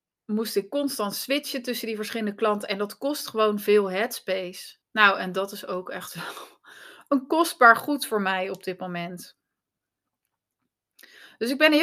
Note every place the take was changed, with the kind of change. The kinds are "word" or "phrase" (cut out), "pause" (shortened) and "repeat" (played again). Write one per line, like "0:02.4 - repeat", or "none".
0:04.8 - pause